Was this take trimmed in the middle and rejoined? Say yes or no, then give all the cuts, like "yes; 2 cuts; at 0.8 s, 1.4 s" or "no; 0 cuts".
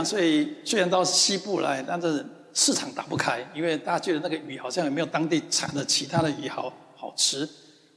no; 0 cuts